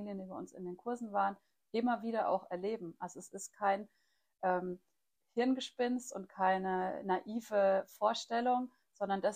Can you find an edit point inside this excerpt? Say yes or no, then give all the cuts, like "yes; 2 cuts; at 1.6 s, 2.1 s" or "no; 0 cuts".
no; 0 cuts